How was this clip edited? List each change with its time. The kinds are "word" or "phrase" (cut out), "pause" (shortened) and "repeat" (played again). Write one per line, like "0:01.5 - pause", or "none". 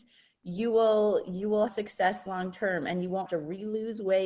0:01.7 - word
0:03.3 - word